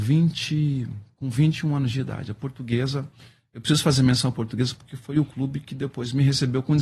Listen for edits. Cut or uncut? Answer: uncut